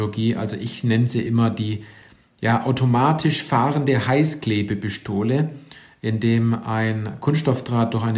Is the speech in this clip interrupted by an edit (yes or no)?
no